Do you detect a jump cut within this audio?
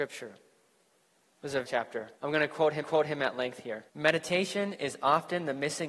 yes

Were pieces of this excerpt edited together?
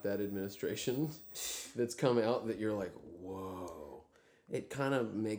no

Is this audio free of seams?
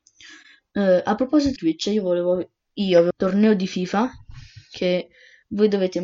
no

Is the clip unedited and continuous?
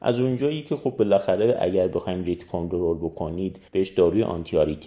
no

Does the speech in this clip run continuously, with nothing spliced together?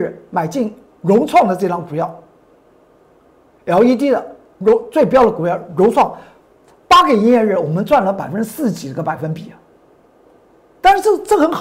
yes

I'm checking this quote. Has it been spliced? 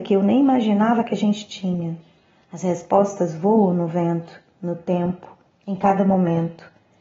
no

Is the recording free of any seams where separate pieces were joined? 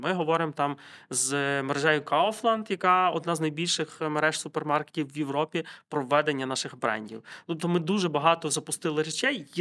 yes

